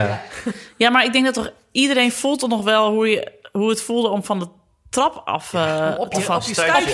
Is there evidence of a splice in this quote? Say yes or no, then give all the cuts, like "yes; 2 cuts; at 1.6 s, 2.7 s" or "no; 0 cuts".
no; 0 cuts